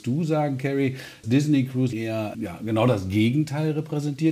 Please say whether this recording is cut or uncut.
cut